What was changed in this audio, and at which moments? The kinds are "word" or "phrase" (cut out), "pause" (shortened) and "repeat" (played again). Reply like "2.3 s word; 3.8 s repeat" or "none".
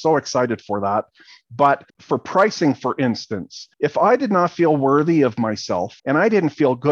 1.9 s pause; 3.7 s pause; 6.0 s pause